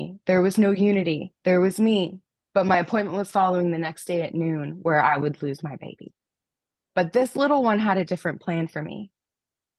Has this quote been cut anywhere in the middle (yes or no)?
no